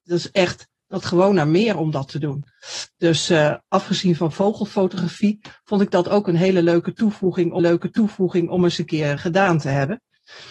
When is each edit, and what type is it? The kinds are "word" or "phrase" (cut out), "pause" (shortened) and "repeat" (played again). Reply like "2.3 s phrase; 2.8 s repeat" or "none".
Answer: 1.0 s word; 7.6 s repeat; 9.2 s word